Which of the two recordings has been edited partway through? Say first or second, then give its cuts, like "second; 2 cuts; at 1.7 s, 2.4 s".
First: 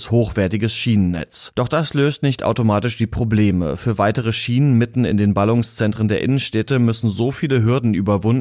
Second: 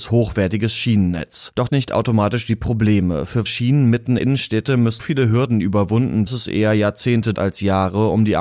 second; 6 cuts; at 1.7 s, 3.5 s, 4.2 s, 5.0 s, 6.3 s, 7.3 s